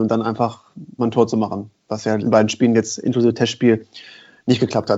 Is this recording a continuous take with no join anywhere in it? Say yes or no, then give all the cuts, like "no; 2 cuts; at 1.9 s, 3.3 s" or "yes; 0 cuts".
no; 2 cuts; at 1.0 s, 2.2 s